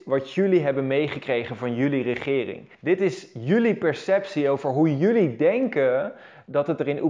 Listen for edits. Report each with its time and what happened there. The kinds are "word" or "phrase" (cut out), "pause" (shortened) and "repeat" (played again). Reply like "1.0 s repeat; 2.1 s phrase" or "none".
2.7 s pause